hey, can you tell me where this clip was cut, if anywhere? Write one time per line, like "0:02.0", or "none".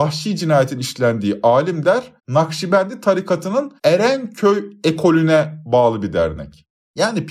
0:02.2
0:03.8